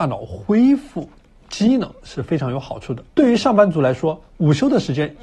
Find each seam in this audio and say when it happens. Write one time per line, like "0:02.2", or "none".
0:03.1